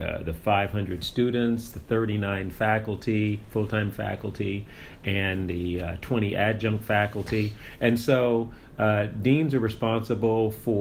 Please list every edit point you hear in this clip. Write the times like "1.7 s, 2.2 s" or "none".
none